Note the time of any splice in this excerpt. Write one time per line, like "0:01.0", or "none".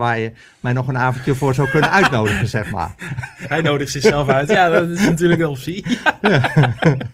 none